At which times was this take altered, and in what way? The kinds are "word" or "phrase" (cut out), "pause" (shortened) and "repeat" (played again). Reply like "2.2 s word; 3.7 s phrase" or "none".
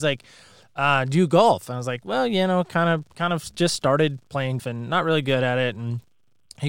4.6 s word